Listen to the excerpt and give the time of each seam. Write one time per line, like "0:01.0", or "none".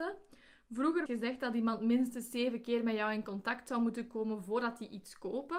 0:01.1

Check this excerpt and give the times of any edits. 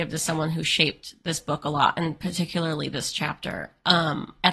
none

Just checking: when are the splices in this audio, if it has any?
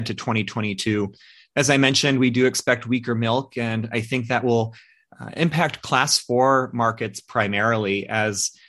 none

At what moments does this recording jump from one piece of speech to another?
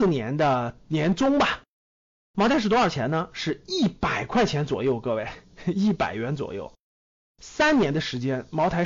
none

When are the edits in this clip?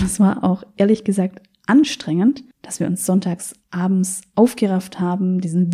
0:02.5
0:03.6

